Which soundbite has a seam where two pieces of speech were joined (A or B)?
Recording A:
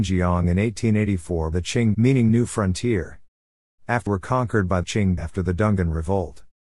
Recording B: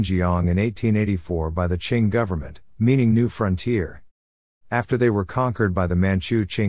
A